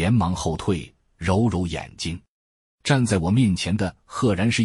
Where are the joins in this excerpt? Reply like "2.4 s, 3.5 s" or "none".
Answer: none